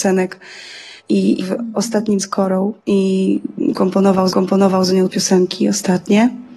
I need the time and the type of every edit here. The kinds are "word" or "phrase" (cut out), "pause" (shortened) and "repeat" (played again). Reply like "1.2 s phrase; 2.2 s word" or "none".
1.0 s pause; 1.4 s phrase; 2.2 s word; 2.8 s pause; 4.3 s repeat; 5.1 s word